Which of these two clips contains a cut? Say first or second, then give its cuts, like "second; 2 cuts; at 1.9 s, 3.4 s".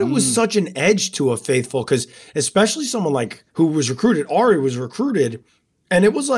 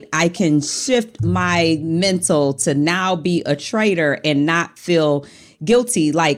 first; 1 cut; at 3.5 s